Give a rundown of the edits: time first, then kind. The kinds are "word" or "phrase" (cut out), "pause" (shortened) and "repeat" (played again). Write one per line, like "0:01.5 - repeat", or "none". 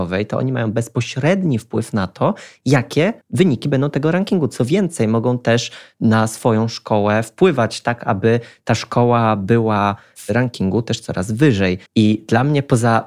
0:03.2 - pause
0:11.9 - pause